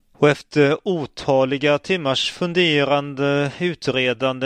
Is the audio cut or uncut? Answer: uncut